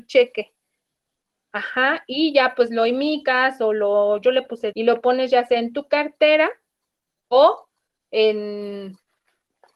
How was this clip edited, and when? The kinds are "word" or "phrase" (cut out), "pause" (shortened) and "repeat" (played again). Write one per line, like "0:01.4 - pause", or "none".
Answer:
0:04.7 - word